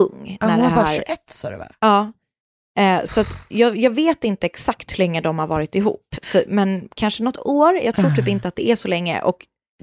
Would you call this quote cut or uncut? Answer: uncut